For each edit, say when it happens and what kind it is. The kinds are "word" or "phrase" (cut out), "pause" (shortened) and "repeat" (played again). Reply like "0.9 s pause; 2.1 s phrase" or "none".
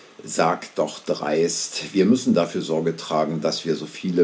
none